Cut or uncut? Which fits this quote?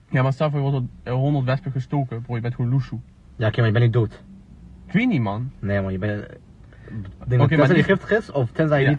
uncut